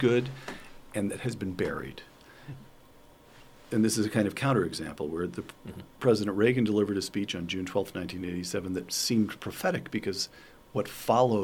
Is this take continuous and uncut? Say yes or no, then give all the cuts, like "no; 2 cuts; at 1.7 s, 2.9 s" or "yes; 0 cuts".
yes; 0 cuts